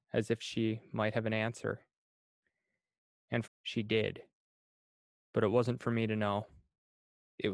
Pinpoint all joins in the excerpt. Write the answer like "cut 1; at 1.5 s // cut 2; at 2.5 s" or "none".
cut 1; at 3.5 s